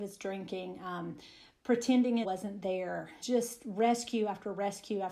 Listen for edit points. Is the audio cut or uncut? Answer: cut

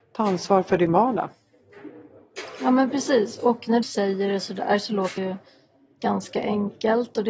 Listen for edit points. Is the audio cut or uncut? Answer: cut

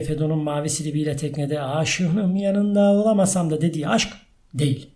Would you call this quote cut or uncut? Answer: uncut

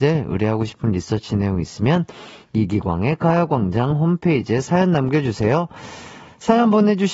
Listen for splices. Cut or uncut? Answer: uncut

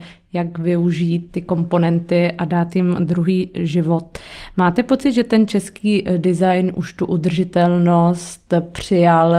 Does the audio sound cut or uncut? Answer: uncut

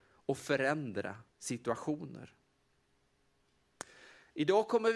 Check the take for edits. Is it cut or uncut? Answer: cut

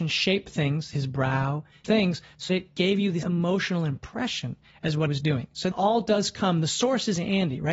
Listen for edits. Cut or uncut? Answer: cut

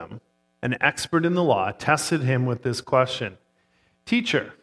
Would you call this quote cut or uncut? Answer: uncut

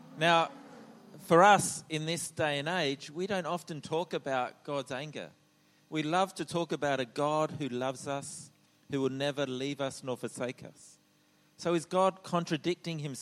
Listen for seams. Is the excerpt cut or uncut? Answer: uncut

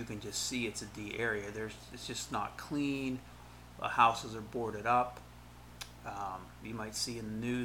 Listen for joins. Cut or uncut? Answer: uncut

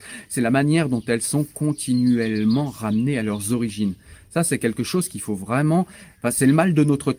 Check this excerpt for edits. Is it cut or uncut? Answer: uncut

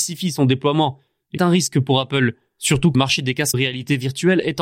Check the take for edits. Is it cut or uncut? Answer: cut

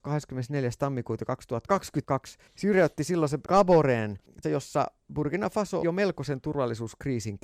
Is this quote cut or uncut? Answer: cut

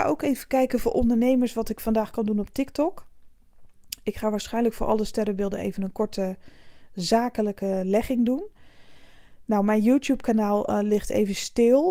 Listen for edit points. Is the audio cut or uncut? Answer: uncut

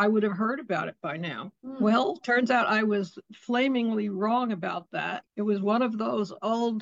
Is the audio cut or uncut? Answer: cut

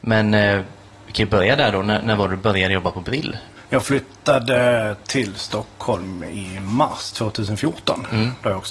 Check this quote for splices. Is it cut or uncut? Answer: cut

